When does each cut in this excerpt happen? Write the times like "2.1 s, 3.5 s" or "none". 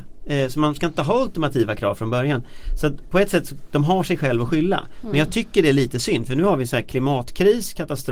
none